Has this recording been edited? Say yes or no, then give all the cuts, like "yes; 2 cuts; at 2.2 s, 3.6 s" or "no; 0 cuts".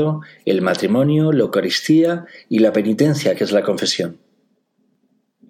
no; 0 cuts